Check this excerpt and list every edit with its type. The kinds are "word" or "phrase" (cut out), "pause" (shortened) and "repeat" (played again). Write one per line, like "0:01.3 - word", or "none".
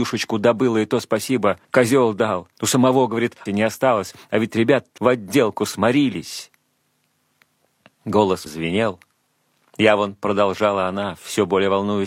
0:01.6 - pause
0:02.5 - pause
0:03.5 - phrase
0:05.0 - word
0:08.5 - word